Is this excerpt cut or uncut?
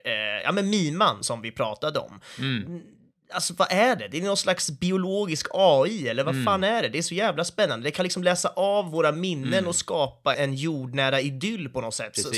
cut